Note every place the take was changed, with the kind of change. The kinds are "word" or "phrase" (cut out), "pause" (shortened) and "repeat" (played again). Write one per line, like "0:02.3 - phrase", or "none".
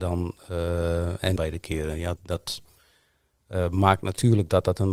0:01.4 - phrase
0:02.2 - word